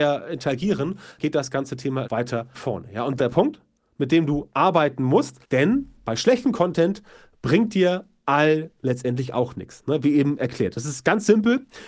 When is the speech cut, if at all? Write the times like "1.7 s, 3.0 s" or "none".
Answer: 1.2 s, 2.0 s, 2.5 s, 3.2 s, 5.4 s, 8.8 s